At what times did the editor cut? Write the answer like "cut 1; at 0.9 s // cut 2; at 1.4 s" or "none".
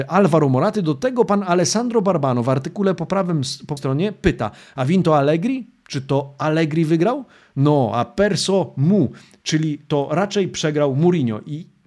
cut 1; at 3.8 s